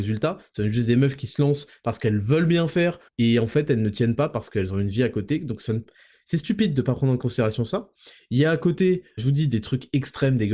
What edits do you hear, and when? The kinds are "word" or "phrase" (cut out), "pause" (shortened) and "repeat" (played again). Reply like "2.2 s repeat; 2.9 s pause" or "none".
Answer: 3.1 s pause; 9.2 s word